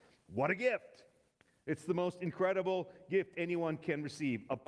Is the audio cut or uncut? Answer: uncut